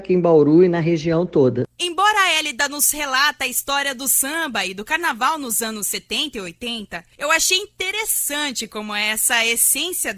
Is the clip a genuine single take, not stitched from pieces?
no; 2 cuts; at 1.7 s, 7.1 s

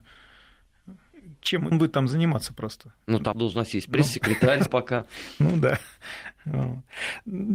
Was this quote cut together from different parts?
yes; 3 cuts; at 1.7 s, 3.3 s, 4.7 s

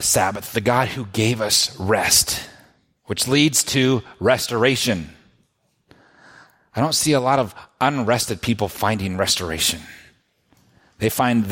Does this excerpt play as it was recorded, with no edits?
yes; 0 cuts

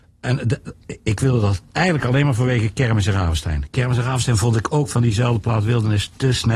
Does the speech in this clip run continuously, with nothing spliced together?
yes; 0 cuts

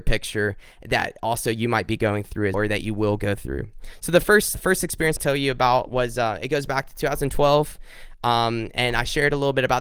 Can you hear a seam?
yes; 3 cuts; at 2.5 s, 4.5 s, 5.2 s

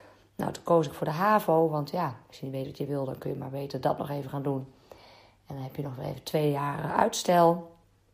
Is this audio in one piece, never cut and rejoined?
yes; 0 cuts

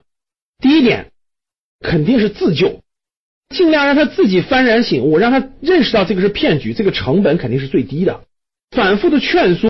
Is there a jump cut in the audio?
no; 0 cuts

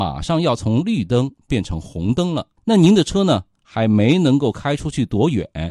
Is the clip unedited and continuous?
no; 1 cut; at 2.6 s

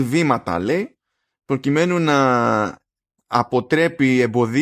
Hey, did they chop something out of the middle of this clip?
no; 0 cuts

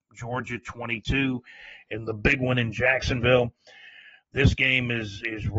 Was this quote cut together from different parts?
no; 0 cuts

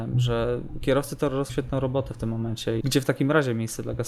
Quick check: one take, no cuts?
no; 2 cuts; at 1.5 s, 2.8 s

